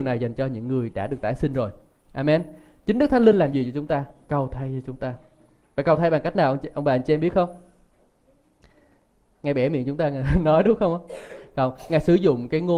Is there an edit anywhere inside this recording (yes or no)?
no